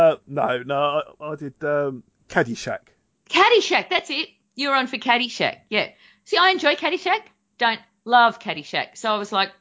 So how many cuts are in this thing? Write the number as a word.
zero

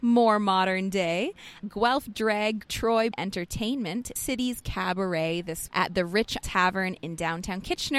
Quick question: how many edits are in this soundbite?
six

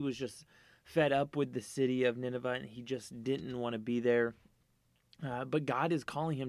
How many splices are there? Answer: zero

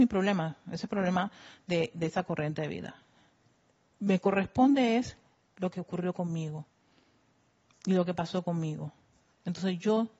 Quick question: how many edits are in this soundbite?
zero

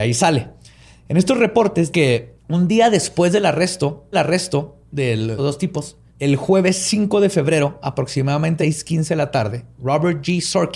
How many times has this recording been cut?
six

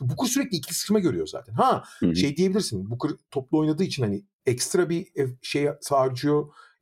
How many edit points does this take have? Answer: zero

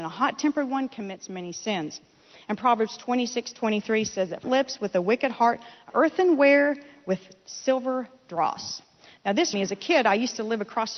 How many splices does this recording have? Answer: three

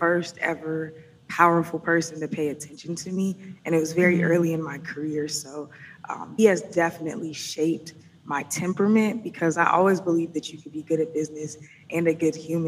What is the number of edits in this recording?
one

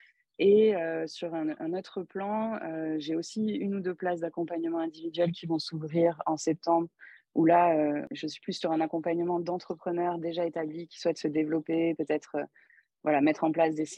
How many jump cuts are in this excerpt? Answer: zero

